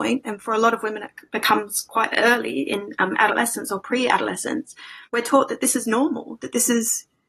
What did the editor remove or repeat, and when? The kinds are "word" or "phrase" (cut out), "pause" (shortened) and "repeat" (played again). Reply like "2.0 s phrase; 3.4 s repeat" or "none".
5.1 s pause